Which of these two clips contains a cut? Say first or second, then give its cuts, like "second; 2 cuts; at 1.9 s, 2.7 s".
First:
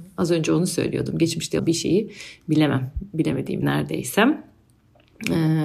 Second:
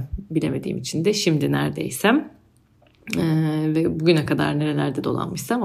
first; 2 cuts; at 1.6 s, 3.6 s